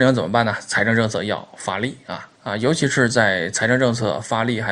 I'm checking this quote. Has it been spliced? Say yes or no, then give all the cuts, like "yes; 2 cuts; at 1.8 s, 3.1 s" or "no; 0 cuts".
yes; 1 cut; at 2.3 s